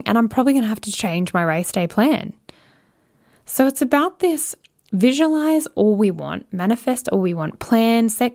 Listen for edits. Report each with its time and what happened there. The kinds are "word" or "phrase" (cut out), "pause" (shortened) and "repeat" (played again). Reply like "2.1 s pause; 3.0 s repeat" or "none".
none

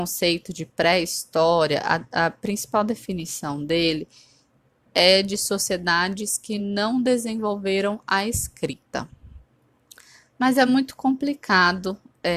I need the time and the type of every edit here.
none

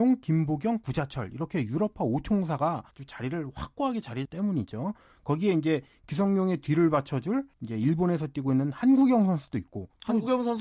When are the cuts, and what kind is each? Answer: 2.9 s pause; 4.2 s phrase; 7.5 s pause

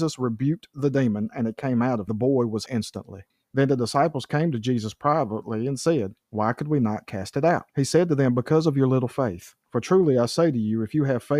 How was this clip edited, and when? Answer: 2.1 s phrase; 2.7 s word; 3.3 s pause; 6.2 s pause; 7.7 s pause; 9.6 s pause

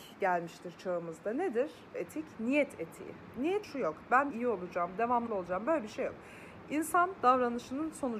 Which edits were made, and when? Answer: 1.9 s word; 3.6 s word; 4.3 s word; 5.3 s word

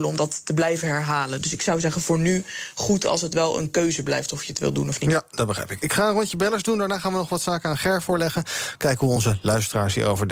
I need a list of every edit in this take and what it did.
none

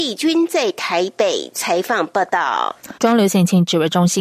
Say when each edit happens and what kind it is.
3.0 s pause

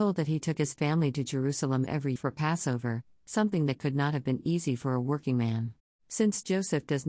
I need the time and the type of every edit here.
2.2 s word; 5.8 s pause

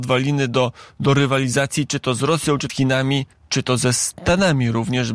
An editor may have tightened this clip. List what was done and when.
2.7 s phrase; 3.3 s pause

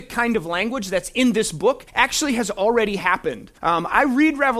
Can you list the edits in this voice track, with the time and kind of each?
1.9 s pause; 3.6 s pause

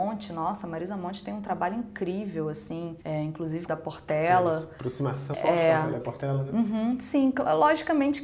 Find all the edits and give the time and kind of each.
3.0 s pause; 3.7 s phrase; 5.3 s word; 6.0 s phrase

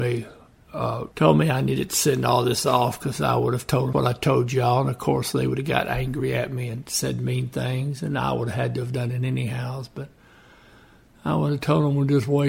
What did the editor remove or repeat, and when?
1.1 s pause; 3.9 s word

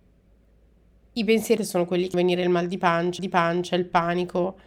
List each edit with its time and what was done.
1.6 s word; 2.1 s word; 3.2 s repeat

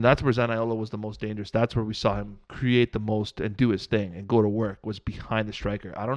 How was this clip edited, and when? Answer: 2.4 s pause

